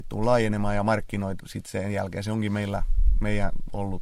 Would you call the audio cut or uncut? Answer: cut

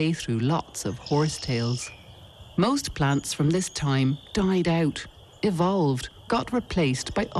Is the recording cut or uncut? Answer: cut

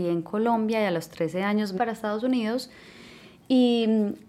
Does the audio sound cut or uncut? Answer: cut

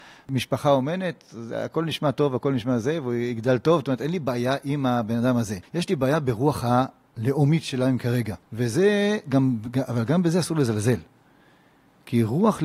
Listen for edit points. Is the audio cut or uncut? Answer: cut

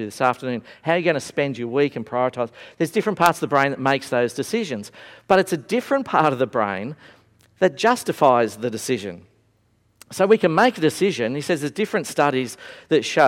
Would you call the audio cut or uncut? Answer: uncut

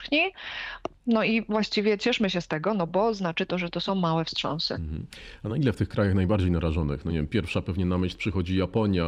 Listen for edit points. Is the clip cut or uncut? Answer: uncut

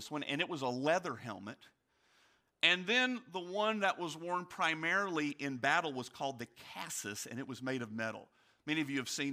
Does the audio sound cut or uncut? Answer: uncut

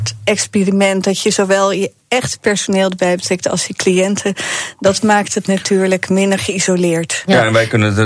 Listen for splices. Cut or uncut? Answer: uncut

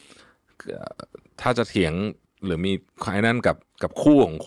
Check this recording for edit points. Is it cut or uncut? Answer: uncut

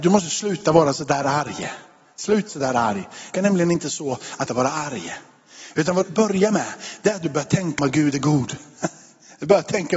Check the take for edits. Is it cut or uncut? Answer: cut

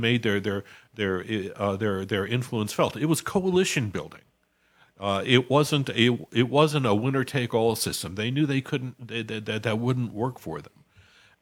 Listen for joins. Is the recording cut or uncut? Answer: uncut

